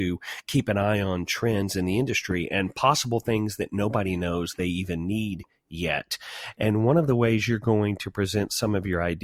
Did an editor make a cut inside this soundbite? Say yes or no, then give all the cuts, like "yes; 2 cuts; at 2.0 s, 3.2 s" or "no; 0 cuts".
no; 0 cuts